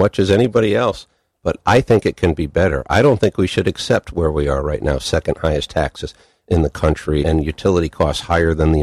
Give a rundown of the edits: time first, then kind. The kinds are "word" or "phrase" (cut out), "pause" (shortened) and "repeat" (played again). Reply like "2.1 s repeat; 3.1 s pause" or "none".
7.2 s word

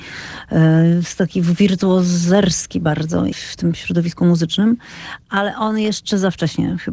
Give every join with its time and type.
3.3 s phrase

